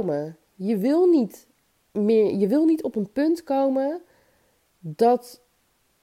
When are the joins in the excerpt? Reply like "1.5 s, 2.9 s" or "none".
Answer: none